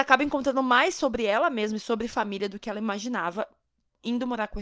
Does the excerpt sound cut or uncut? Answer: uncut